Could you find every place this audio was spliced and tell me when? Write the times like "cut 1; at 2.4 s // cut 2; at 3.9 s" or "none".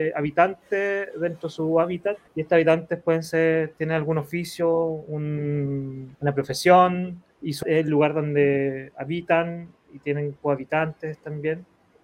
cut 1; at 2.3 s // cut 2; at 6.1 s // cut 3; at 7.3 s // cut 4; at 7.6 s